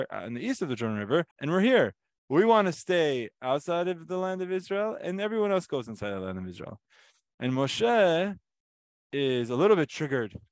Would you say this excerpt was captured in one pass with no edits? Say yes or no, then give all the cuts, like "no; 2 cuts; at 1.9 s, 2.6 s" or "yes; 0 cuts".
no; 1 cut; at 1.3 s